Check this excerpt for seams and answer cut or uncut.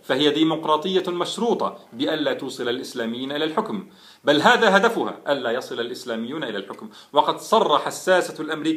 uncut